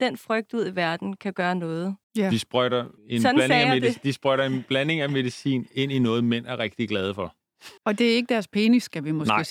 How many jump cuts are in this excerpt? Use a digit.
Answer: 3